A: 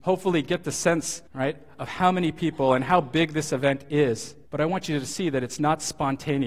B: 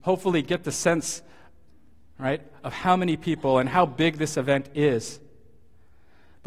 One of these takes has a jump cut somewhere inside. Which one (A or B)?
A